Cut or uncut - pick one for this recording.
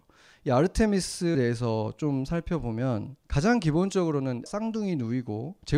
cut